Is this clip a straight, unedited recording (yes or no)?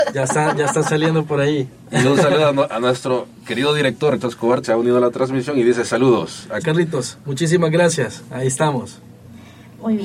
no